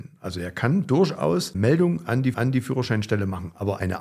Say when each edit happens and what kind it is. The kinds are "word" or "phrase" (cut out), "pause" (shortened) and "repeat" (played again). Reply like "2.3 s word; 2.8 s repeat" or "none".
1.5 s word; 2.3 s repeat